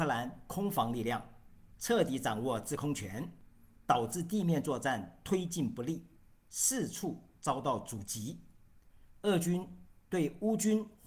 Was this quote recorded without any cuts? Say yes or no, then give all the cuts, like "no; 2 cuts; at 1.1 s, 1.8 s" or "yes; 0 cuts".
yes; 0 cuts